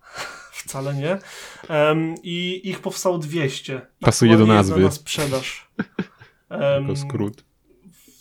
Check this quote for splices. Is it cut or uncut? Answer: cut